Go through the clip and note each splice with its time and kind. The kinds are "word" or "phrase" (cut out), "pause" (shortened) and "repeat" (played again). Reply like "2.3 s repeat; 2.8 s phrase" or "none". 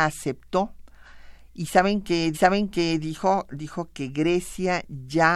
2.3 s repeat